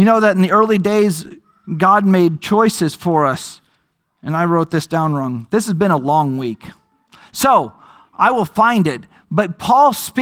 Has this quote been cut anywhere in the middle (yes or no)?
no